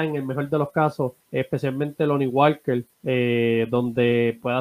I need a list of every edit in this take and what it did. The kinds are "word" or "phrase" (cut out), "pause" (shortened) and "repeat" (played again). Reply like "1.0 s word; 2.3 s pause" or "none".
1.2 s pause; 2.9 s pause